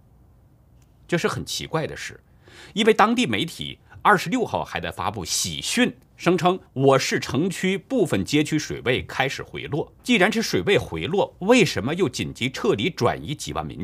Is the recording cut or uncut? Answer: cut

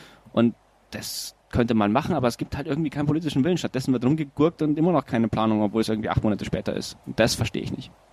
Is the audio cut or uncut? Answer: cut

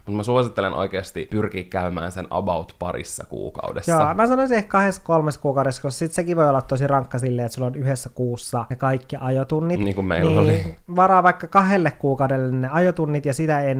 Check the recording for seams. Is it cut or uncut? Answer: uncut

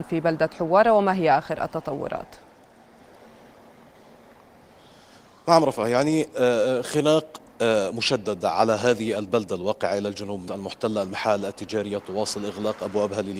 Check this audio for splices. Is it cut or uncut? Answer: cut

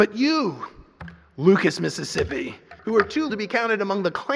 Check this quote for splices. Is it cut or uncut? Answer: cut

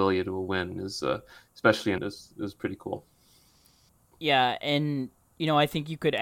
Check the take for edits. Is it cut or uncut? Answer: cut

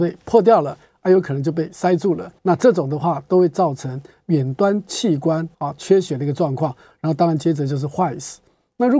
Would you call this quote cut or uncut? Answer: cut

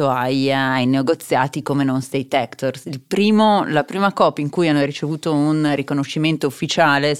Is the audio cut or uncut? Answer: uncut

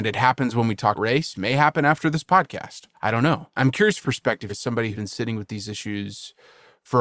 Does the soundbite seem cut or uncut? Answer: cut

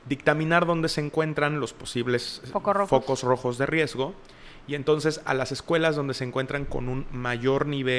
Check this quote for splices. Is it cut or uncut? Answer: uncut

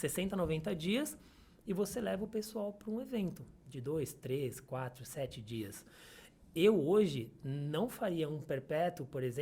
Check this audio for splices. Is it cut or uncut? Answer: uncut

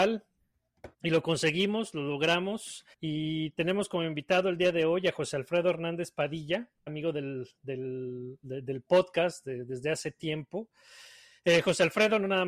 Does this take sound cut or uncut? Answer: cut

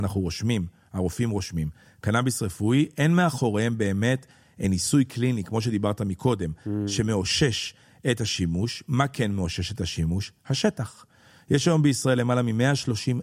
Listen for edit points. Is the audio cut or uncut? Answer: uncut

